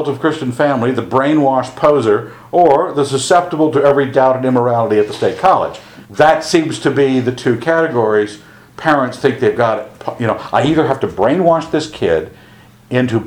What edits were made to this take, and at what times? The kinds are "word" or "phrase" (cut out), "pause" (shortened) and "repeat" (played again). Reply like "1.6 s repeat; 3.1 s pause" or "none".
6.0 s pause